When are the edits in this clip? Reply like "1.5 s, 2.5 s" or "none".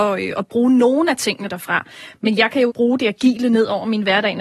2.7 s